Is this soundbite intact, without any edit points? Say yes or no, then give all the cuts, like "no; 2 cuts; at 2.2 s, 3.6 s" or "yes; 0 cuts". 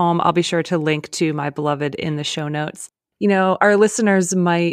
yes; 0 cuts